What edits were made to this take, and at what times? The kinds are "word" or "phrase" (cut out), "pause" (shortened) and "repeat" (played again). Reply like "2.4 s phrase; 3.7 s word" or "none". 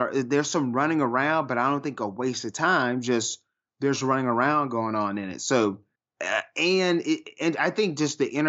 none